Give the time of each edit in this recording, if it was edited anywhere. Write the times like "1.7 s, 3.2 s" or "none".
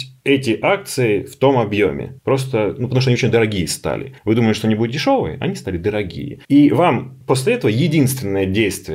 2.2 s, 4.2 s, 6.4 s, 7.2 s